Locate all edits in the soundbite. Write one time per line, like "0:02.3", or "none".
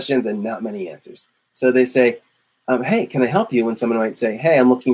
none